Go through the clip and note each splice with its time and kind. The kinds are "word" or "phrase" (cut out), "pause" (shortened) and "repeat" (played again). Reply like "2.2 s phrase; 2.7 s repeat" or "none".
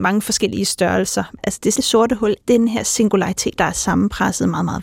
1.8 s word; 2.4 s word; 3.6 s word